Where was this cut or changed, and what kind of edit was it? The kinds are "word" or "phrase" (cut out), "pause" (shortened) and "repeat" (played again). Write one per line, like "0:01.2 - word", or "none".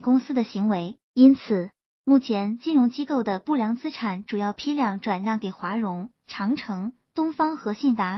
0:01.0 - pause